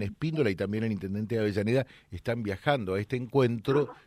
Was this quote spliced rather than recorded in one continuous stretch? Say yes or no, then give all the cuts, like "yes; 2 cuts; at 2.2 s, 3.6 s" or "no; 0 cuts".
no; 0 cuts